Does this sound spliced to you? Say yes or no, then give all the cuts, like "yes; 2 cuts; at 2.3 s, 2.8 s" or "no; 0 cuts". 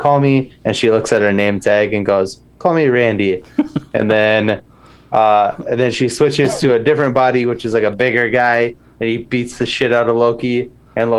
no; 0 cuts